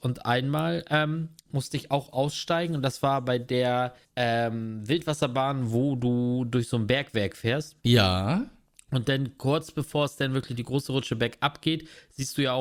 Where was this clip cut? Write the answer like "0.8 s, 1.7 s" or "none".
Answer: 4.0 s, 7.8 s